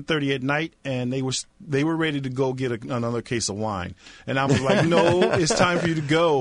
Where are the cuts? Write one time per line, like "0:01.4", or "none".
none